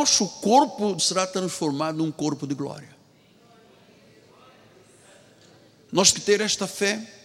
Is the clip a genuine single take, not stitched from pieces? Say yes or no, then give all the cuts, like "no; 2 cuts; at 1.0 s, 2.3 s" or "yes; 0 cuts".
no; 2 cuts; at 1.0 s, 6.1 s